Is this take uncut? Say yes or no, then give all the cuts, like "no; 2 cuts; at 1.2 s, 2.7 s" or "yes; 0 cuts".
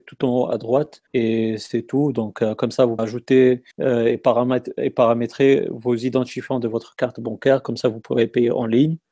no; 3 cuts; at 1.1 s, 3.0 s, 3.7 s